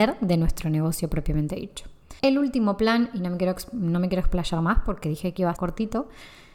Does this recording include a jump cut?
yes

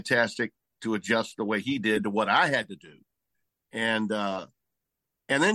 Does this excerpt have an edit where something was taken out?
no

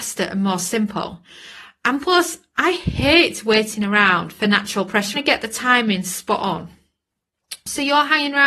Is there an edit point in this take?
yes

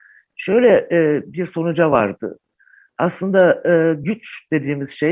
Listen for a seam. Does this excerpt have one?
no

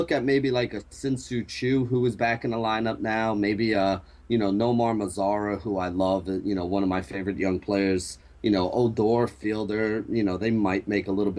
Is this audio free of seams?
yes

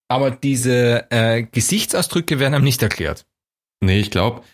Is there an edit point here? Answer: yes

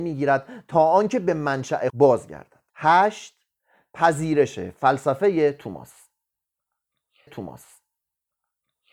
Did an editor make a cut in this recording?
yes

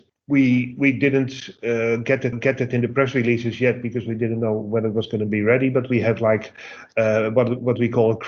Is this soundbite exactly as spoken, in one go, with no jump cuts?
no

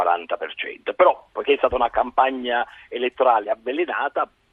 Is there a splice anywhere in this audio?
yes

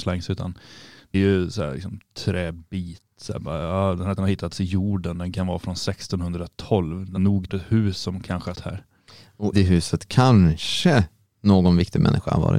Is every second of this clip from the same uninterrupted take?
no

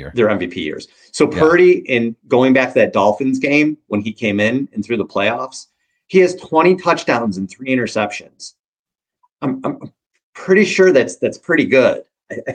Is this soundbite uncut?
yes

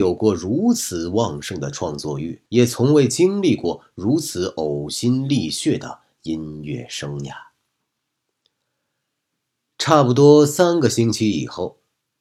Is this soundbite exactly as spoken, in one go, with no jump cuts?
no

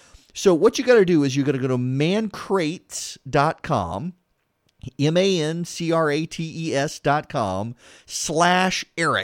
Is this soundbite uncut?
yes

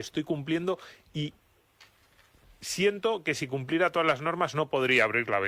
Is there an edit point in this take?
no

